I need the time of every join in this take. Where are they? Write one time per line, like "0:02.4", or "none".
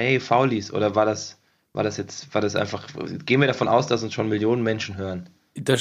none